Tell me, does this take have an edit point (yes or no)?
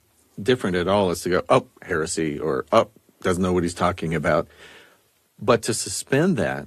no